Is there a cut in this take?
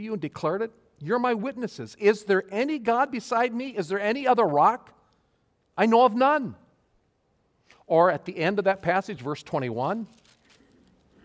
no; 0 cuts

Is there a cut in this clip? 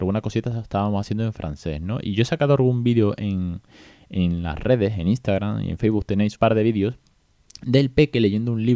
yes; 1 cut; at 6.3 s

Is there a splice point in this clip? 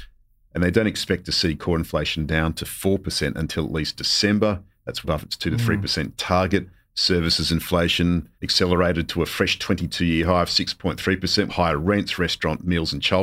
yes; 3 cuts; at 5.0 s, 8.3 s, 11.5 s

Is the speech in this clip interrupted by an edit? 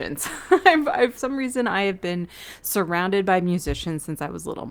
yes; 1 cut; at 1.2 s

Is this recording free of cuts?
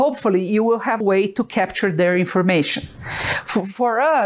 no; 1 cut; at 1.0 s

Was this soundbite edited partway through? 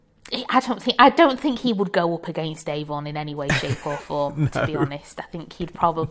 no; 0 cuts

